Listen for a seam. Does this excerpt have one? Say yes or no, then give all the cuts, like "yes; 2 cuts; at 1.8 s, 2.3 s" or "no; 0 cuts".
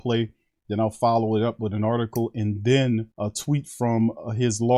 yes; 1 cut; at 3.1 s